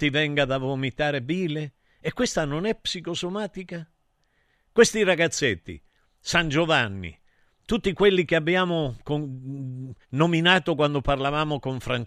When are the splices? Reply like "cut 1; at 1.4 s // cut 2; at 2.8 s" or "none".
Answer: cut 1; at 10.0 s